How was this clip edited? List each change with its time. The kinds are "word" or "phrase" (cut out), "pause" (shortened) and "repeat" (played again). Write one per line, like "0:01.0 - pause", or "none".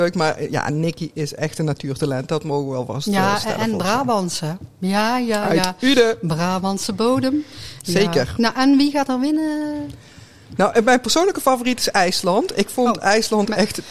none